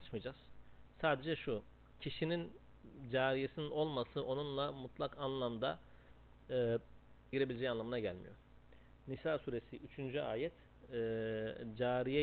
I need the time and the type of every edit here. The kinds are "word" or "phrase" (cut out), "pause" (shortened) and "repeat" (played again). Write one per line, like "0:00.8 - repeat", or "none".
0:07.3 - word